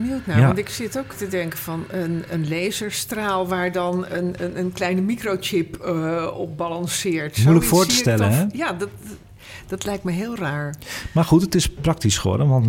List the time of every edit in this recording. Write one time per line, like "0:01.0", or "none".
0:02.3